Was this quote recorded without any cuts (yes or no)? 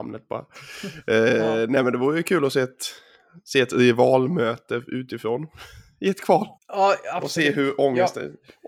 no